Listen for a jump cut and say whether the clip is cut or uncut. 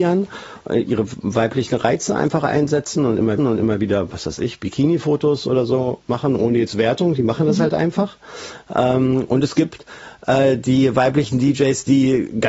cut